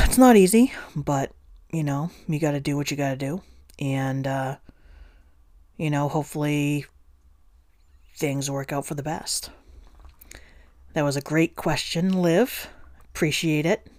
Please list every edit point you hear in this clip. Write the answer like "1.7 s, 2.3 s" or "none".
none